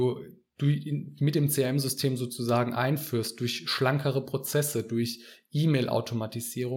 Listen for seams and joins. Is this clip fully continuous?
yes; 0 cuts

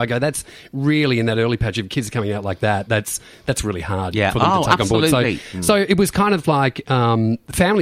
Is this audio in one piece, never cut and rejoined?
yes; 0 cuts

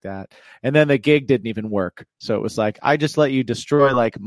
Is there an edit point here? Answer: no; 0 cuts

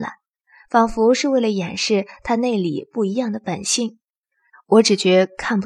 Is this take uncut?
yes; 0 cuts

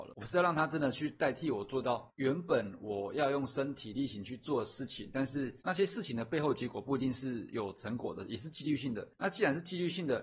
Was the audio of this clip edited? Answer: yes; 1 cut; at 5.6 s

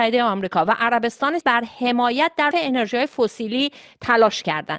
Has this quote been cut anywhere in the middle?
yes; 2 cuts; at 1.4 s, 2.5 s

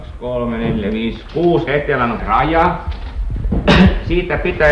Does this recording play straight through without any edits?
no; 2 cuts; at 1.7 s, 2.2 s

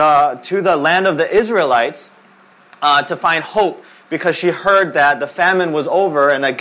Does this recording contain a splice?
no; 0 cuts

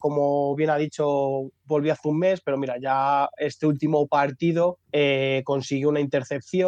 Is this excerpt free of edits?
no; 1 cut; at 4.8 s

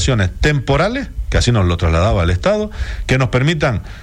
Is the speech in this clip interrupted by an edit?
no; 0 cuts

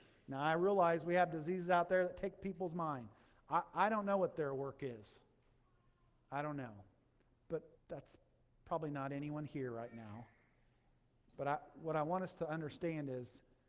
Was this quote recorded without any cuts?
no; 1 cut; at 7.8 s

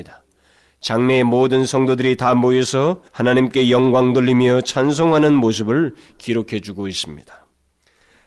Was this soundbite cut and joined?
yes; 1 cut; at 3.1 s

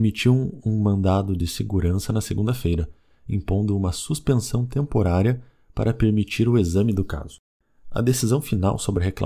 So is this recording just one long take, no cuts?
yes; 0 cuts

